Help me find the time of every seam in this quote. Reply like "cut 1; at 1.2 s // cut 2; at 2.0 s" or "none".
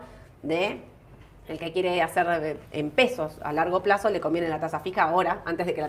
cut 1; at 2.6 s